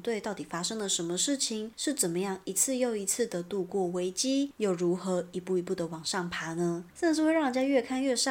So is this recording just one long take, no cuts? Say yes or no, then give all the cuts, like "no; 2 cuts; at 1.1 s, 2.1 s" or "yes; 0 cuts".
yes; 0 cuts